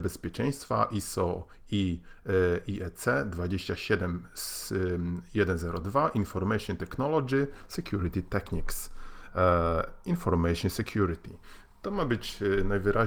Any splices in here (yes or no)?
no